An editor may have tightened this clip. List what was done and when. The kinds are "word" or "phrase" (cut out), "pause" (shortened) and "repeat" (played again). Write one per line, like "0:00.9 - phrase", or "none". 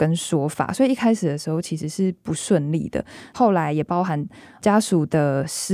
none